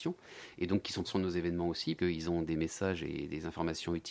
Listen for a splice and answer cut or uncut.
cut